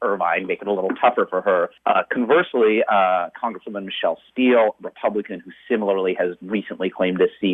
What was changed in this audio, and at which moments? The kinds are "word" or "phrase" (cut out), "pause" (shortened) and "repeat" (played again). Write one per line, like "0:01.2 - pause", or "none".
none